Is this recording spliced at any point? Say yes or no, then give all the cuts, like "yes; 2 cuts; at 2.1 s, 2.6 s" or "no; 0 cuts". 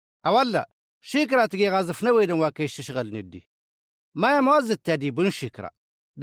no; 0 cuts